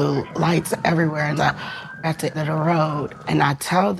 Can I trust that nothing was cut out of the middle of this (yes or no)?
no